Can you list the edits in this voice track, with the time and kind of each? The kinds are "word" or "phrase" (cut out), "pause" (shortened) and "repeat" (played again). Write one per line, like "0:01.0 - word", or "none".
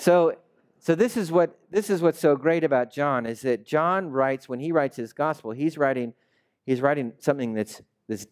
none